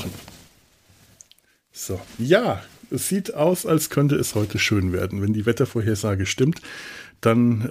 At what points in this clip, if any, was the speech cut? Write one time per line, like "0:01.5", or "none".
none